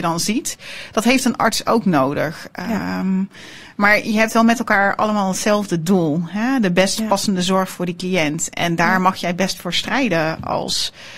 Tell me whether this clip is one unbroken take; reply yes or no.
yes